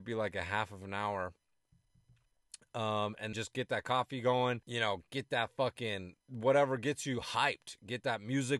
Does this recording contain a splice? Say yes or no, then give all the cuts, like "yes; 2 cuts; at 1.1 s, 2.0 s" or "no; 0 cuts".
yes; 3 cuts; at 3.3 s, 4.6 s, 6.2 s